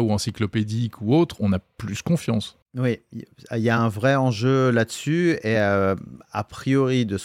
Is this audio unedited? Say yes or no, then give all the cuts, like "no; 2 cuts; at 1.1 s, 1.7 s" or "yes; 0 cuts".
yes; 0 cuts